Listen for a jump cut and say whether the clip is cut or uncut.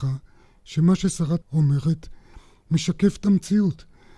cut